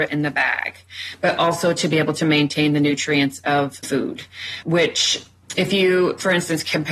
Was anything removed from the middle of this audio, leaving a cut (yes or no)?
yes